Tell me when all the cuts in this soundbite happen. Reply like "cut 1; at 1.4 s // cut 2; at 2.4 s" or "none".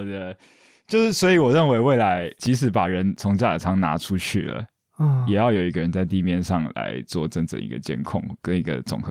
none